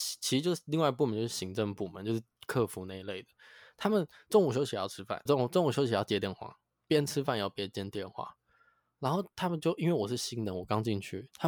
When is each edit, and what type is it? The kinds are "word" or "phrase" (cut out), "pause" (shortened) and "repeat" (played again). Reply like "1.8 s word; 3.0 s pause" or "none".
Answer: 5.3 s word